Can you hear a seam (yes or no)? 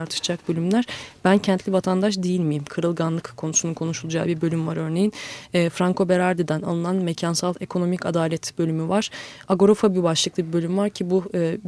no